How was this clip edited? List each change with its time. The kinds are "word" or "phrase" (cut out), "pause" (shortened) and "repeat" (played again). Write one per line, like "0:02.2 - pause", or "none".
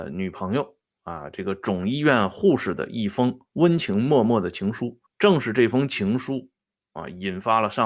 0:05.1 - pause